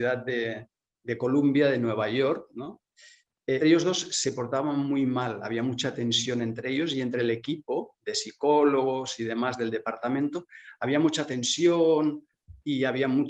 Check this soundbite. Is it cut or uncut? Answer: cut